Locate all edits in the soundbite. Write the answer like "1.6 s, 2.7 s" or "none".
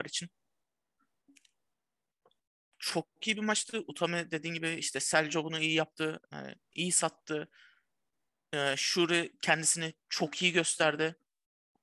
none